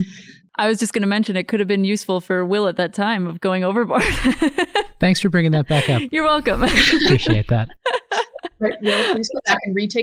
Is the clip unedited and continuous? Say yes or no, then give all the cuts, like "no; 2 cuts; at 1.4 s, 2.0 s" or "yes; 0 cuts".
yes; 0 cuts